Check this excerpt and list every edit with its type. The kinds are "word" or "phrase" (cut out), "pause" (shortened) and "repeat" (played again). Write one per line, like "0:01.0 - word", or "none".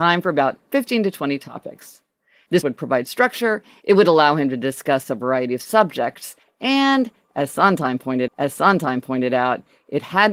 0:02.6 - word
0:08.3 - repeat